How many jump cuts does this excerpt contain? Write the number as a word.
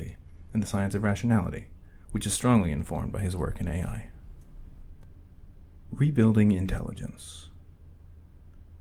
zero